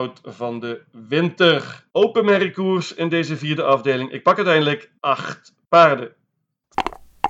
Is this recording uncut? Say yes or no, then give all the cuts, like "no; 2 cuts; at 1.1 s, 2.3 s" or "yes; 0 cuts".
no; 2 cuts; at 1.9 s, 5.0 s